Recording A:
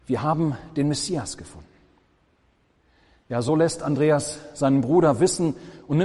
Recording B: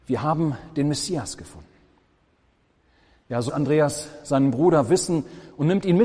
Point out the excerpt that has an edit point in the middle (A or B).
B